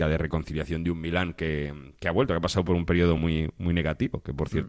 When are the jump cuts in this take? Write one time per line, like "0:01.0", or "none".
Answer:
none

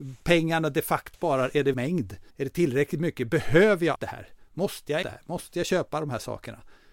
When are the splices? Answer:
0:01.1
0:01.7
0:02.3
0:04.0
0:05.0

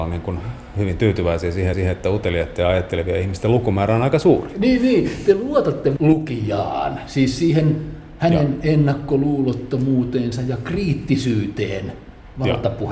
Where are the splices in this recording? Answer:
0:01.7
0:06.0

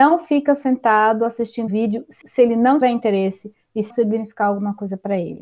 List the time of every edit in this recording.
0:01.7
0:02.2
0:02.8
0:03.9

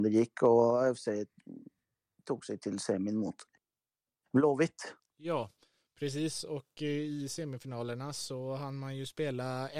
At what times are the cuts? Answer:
none

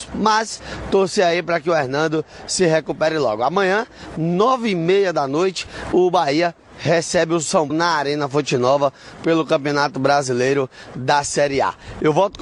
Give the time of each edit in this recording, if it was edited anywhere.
0:07.7

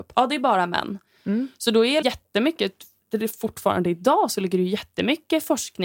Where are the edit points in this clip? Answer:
0:02.0

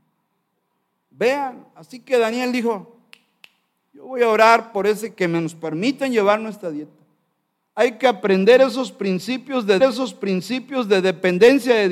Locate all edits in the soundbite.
0:09.8

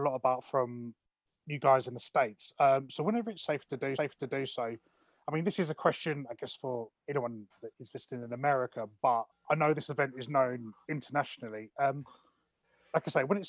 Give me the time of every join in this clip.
0:04.0
0:09.3
0:10.8

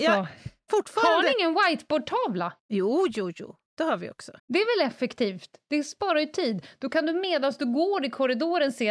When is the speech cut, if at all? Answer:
0:02.6
0:03.7
0:04.4

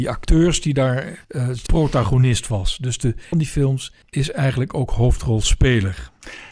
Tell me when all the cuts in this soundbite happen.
0:01.2
0:01.7
0:03.3
0:04.0

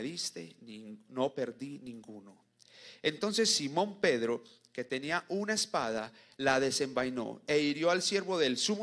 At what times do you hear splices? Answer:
none

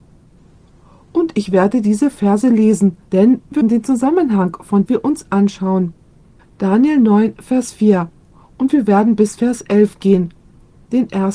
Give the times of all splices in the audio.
0:03.1
0:03.6
0:04.9
0:06.4

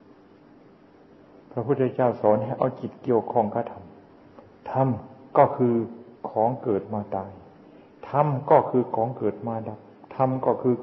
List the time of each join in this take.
0:06.2

